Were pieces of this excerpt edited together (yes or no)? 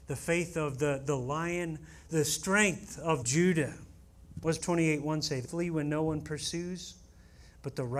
yes